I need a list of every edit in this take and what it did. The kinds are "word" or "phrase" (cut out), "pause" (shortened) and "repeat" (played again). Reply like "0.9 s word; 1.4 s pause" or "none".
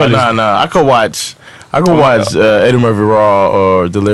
none